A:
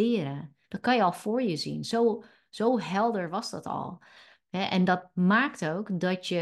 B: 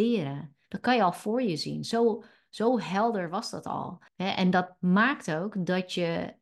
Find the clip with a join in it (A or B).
B